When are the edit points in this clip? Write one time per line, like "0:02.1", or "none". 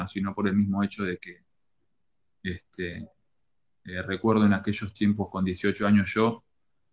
none